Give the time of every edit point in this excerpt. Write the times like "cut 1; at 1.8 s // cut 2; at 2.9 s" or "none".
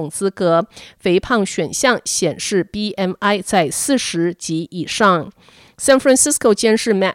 none